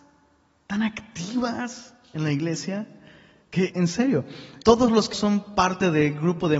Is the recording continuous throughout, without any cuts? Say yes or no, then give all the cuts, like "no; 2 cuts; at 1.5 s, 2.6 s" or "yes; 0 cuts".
no; 3 cuts; at 3.7 s, 4.6 s, 5.1 s